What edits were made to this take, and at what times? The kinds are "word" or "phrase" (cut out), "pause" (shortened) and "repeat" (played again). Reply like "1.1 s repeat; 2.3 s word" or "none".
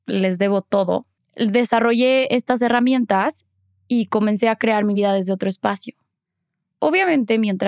none